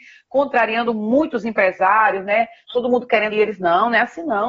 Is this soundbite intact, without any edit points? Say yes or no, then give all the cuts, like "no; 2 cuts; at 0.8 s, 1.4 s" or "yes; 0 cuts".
no; 1 cut; at 3.3 s